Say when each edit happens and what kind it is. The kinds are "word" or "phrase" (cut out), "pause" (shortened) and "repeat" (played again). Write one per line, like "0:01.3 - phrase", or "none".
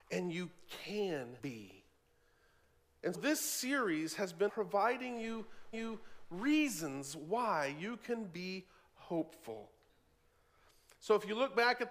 0:01.4 - pause
0:03.1 - word
0:04.5 - word
0:05.7 - repeat